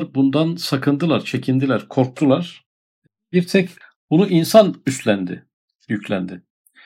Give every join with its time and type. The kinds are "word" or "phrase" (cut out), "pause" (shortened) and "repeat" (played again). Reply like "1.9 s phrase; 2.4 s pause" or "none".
none